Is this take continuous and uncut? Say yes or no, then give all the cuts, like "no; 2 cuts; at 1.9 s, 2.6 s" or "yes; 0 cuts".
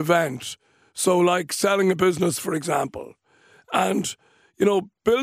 yes; 0 cuts